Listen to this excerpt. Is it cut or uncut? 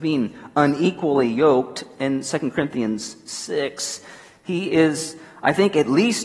uncut